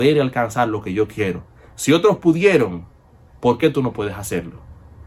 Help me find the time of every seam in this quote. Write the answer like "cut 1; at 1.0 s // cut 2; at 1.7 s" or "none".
none